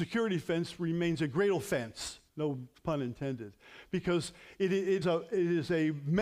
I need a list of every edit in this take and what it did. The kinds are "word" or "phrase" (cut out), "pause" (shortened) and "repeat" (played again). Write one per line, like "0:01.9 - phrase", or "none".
0:02.3 - pause
0:05.0 - word